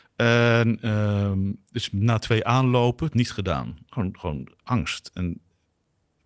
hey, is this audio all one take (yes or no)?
no